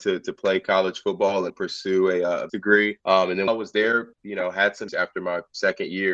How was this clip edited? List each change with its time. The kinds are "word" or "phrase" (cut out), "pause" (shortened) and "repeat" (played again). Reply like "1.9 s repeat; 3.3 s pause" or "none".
1.5 s word; 2.5 s word; 3.0 s pause; 3.5 s word; 4.1 s pause; 4.9 s word